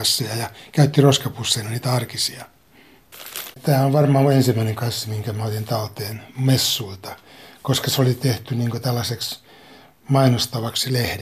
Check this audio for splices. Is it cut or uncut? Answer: cut